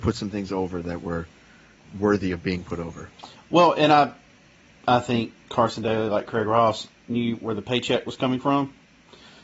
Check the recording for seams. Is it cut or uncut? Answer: uncut